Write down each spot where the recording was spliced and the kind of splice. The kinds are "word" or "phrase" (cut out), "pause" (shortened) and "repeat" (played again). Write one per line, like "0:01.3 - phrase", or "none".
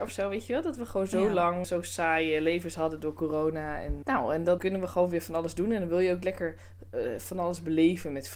0:01.6 - word
0:04.0 - word
0:04.6 - word